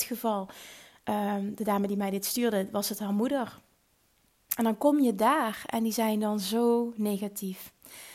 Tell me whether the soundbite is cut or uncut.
uncut